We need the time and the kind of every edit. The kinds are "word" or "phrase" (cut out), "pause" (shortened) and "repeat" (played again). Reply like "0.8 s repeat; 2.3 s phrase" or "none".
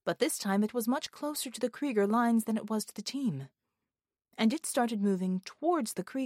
none